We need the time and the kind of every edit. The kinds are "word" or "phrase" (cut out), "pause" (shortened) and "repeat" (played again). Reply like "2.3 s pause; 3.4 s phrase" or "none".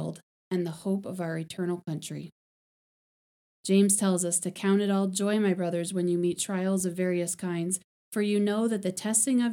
none